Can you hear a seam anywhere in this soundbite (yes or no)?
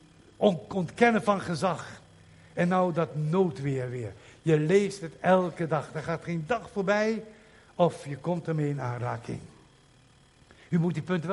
no